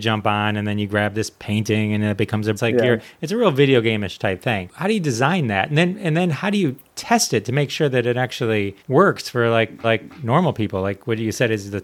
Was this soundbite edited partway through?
yes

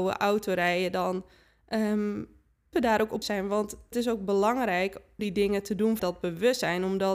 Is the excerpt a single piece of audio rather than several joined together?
no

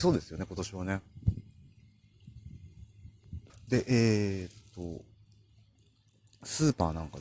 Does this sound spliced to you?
yes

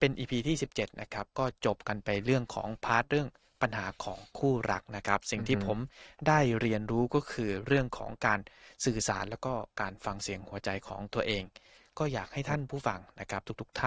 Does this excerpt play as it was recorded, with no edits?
yes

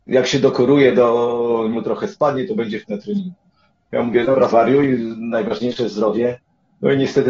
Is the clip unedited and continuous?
no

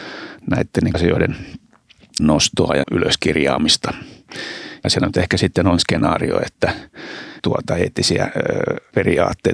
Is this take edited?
yes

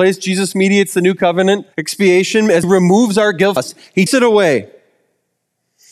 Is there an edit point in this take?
yes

